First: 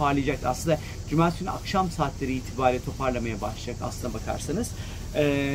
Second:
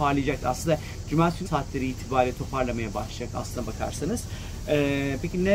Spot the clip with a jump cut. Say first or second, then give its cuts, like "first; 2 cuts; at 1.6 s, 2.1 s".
second; 1 cut; at 1.5 s